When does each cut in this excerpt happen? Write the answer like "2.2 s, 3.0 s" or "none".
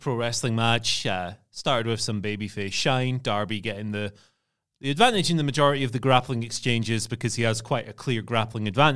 none

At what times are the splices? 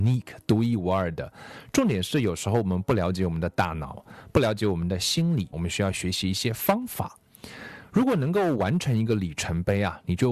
5.5 s

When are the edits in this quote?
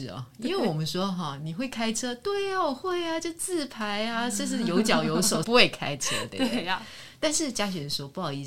5.4 s

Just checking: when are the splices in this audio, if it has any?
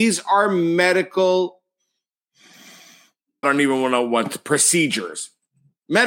3.4 s

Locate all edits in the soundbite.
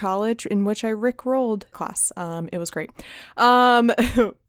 1.7 s

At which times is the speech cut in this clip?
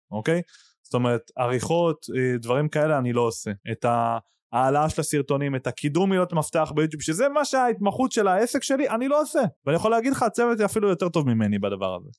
3.6 s, 9.6 s

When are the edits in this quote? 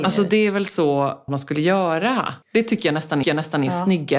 1.3 s, 2.4 s, 3.2 s

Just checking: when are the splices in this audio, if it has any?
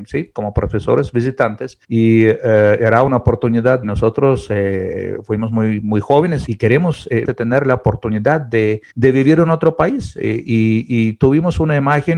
1.8 s, 3.8 s, 6.5 s, 7.2 s, 8.9 s

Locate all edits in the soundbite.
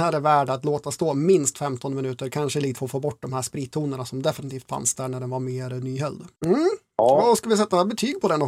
2.8 s, 6.3 s

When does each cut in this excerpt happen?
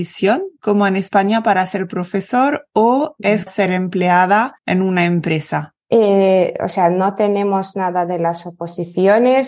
3.5 s, 4.6 s, 5.8 s

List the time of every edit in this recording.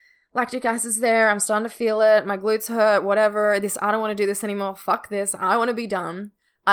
none

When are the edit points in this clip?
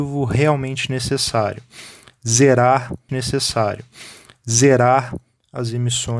3.1 s

